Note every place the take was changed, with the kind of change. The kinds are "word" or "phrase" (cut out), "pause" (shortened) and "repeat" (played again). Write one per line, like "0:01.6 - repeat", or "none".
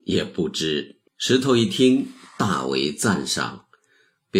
0:01.1 - pause